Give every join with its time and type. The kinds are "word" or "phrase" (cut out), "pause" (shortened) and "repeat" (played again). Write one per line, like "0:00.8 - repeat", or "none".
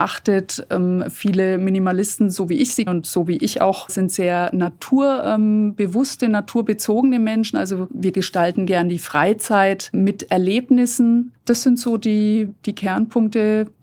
0:02.9 - word
0:03.9 - phrase
0:11.4 - pause